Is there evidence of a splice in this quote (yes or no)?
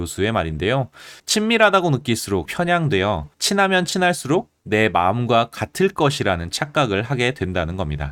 yes